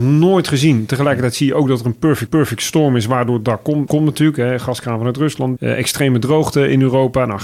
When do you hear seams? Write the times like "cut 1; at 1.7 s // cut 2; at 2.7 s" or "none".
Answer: cut 1; at 2.3 s // cut 2; at 3.9 s // cut 3; at 5.6 s